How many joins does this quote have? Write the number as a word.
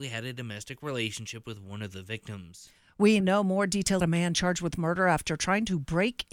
two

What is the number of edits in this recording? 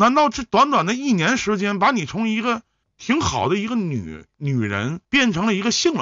two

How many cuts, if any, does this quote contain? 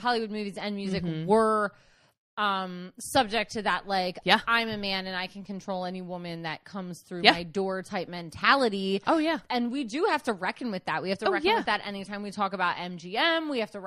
zero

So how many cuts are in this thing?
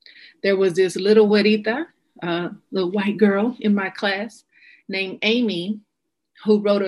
zero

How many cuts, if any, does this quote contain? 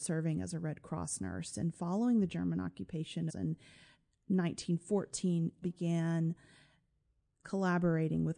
two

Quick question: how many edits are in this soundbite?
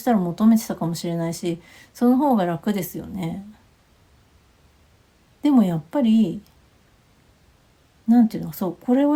zero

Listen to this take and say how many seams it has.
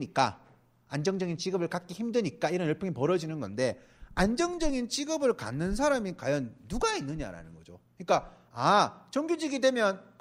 zero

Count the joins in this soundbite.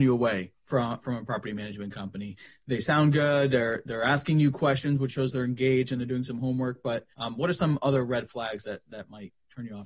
one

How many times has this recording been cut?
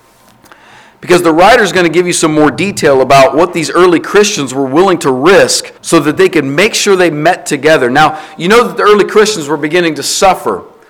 one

